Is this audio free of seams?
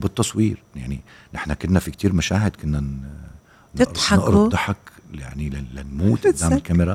yes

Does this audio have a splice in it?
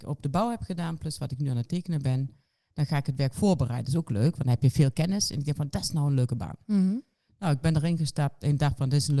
no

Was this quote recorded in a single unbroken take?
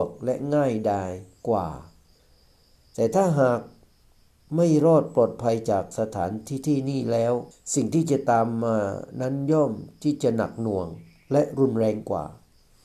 no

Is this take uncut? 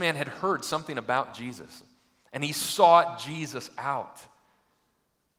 yes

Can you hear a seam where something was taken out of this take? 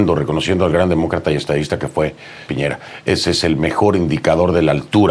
yes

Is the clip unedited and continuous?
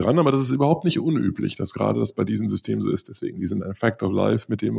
yes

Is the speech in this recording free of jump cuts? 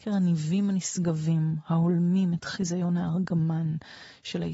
yes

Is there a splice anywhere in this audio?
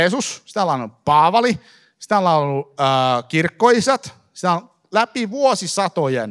no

